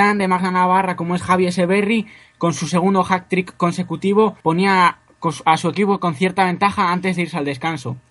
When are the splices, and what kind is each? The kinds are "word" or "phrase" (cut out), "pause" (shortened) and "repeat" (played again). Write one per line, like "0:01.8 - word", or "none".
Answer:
0:04.4 - pause